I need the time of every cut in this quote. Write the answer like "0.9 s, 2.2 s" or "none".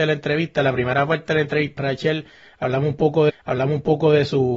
1.8 s, 3.3 s